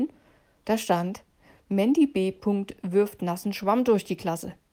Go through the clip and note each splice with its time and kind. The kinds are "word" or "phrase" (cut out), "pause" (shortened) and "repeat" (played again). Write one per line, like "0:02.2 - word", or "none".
none